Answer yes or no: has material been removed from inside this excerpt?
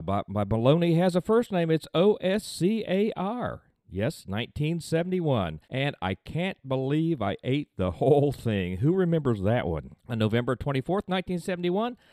yes